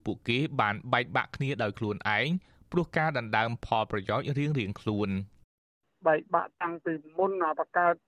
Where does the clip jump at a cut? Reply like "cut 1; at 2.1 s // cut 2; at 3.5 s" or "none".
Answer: none